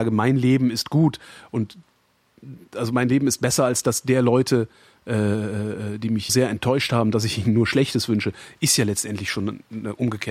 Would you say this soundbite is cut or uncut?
cut